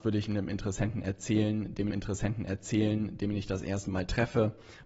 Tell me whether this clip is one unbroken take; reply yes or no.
no